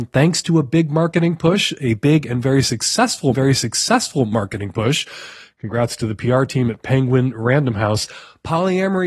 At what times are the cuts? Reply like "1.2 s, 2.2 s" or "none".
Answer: 3.3 s

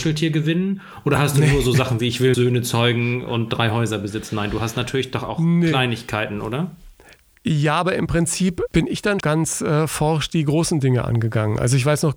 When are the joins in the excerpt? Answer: 2.3 s, 8.7 s, 9.2 s

